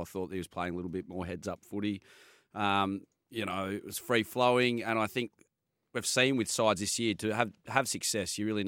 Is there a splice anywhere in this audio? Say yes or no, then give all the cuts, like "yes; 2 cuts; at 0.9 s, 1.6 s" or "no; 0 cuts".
no; 0 cuts